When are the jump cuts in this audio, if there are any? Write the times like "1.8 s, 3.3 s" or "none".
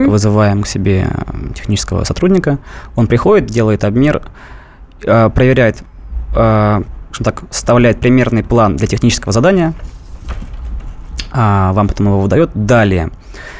none